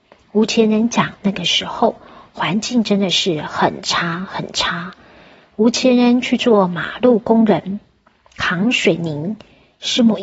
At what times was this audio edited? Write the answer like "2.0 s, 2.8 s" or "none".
none

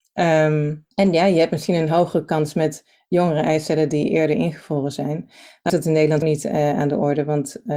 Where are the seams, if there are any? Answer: 0.9 s, 5.7 s, 6.2 s

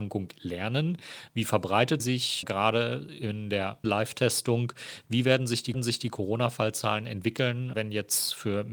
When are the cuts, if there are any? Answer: 2.0 s, 2.4 s, 3.8 s, 5.7 s, 7.7 s

